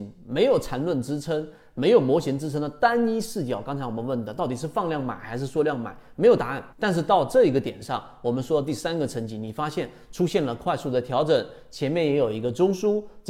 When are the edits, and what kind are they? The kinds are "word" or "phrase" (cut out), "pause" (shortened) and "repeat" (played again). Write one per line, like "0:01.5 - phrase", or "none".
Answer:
0:06.7 - pause